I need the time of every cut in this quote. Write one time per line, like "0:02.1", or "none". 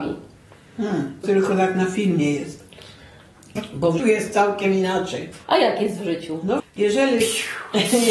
0:01.2
0:04.0
0:05.4
0:06.6

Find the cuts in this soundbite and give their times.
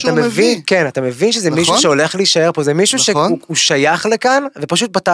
none

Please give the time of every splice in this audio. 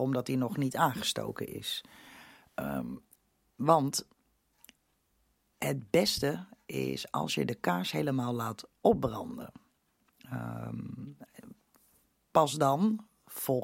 none

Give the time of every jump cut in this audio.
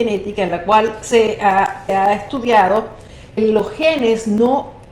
0:01.9
0:03.4

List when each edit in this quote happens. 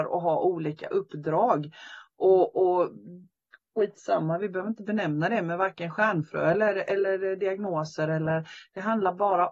none

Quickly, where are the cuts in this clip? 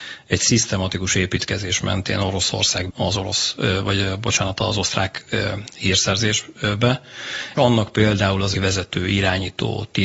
0:02.9
0:07.6
0:08.5

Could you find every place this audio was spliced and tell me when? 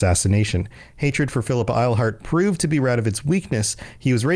none

